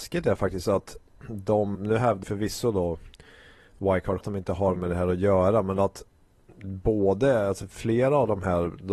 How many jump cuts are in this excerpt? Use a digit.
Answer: 4